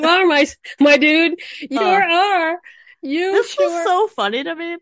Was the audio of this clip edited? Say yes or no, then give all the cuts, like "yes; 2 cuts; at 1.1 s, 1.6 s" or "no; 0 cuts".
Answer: yes; 1 cut; at 1.8 s